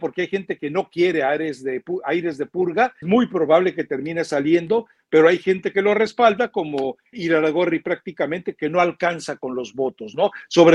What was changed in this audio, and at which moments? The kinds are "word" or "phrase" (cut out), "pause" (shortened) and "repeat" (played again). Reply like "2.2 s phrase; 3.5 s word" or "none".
3.0 s word; 7.1 s word